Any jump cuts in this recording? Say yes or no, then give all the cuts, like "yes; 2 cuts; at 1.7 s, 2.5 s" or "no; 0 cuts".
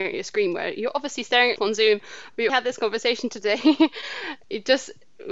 yes; 2 cuts; at 1.6 s, 2.5 s